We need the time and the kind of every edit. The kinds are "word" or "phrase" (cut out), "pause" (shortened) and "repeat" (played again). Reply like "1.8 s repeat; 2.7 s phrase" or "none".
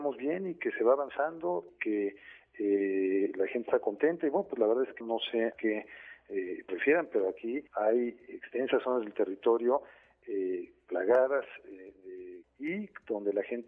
1.7 s word; 5.0 s word; 5.5 s word; 6.7 s phrase; 7.7 s pause; 12.4 s phrase